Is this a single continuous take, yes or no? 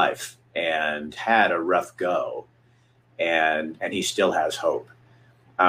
no